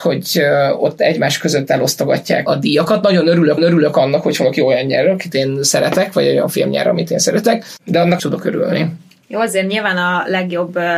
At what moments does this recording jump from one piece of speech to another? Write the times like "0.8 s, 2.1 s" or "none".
2.5 s, 3.6 s, 5.3 s, 8.2 s